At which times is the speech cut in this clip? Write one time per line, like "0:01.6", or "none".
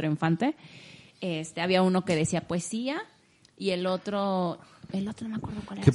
none